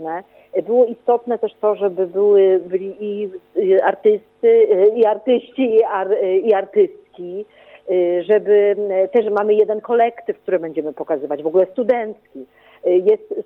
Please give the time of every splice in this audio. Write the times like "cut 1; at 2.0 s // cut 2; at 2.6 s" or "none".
none